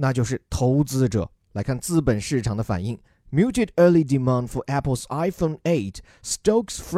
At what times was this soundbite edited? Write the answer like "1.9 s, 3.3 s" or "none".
none